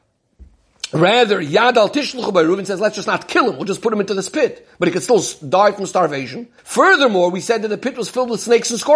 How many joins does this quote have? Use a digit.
1